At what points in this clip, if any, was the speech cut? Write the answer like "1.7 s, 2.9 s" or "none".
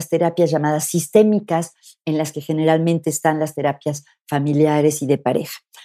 none